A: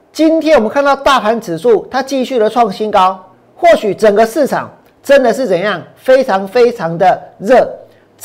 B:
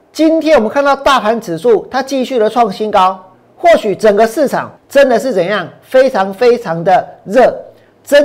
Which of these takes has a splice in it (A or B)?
B